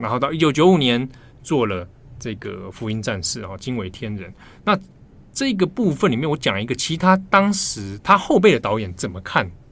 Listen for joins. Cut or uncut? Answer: uncut